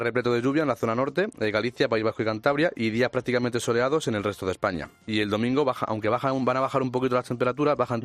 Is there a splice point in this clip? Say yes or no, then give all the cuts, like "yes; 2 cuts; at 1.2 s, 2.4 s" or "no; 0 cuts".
no; 0 cuts